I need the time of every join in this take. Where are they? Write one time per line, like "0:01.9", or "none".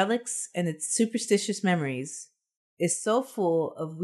0:02.5